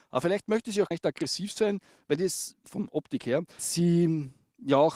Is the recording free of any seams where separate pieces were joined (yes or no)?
no